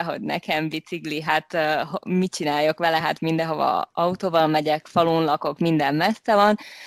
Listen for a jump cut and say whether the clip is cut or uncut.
uncut